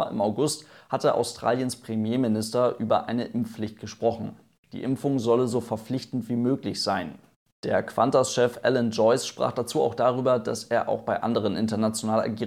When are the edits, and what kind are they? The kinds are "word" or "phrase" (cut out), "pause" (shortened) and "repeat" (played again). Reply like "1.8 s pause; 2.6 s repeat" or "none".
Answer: none